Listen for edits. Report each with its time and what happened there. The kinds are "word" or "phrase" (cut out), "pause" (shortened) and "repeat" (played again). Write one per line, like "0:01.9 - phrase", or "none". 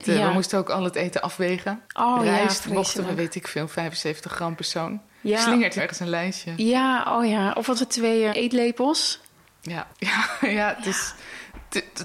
0:01.8 - pause
0:04.6 - word
0:05.8 - phrase
0:07.8 - word
0:08.3 - word
0:09.9 - pause